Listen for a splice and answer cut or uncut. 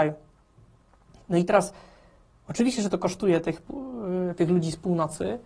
uncut